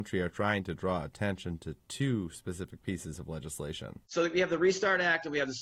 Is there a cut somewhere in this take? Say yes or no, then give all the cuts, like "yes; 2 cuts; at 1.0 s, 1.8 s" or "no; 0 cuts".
yes; 1 cut; at 4.0 s